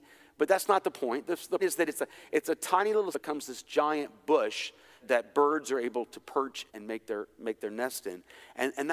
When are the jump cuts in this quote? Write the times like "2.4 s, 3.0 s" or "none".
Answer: 1.6 s, 3.1 s, 5.0 s, 6.7 s